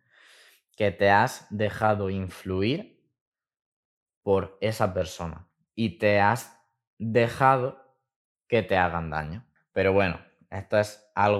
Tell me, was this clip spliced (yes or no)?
no